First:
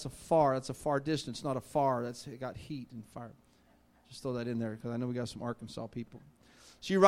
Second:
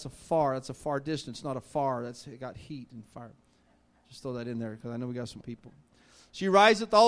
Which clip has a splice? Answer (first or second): second